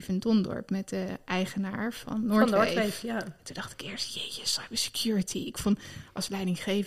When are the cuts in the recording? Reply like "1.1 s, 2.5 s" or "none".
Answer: none